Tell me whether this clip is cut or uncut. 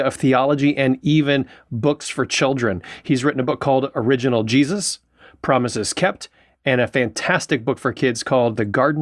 uncut